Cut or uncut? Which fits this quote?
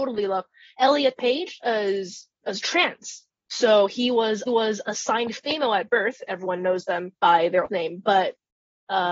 cut